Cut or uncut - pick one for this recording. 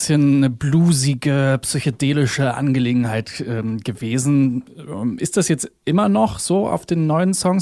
uncut